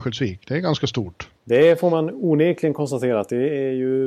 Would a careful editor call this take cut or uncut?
cut